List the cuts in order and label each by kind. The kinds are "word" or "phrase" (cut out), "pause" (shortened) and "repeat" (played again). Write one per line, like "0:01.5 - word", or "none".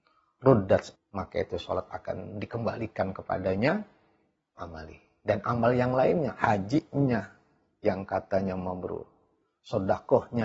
0:01.0 - word
0:04.6 - word